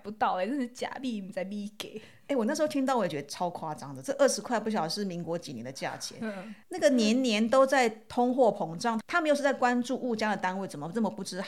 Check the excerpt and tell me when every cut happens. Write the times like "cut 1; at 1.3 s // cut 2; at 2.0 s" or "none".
cut 1; at 6.6 s